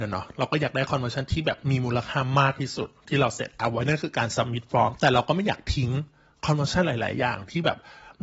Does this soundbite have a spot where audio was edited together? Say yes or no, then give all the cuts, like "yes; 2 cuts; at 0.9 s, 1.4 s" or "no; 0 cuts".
no; 0 cuts